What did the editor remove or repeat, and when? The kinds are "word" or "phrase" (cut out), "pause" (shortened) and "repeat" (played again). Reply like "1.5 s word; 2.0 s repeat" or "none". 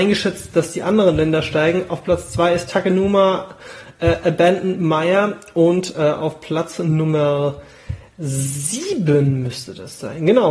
none